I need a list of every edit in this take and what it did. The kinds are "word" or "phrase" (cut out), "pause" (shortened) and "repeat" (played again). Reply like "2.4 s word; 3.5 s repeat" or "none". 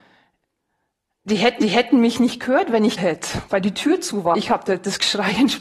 1.6 s repeat; 3.0 s word; 4.3 s word